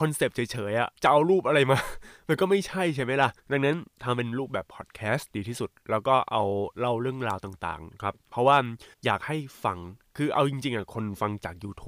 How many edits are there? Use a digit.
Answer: 3